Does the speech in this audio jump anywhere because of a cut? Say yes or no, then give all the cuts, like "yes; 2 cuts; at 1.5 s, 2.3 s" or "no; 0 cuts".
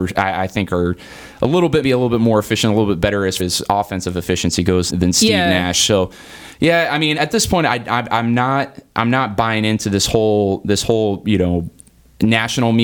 yes; 4 cuts; at 1.8 s, 3.4 s, 4.9 s, 7.2 s